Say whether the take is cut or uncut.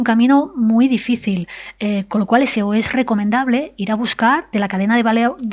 cut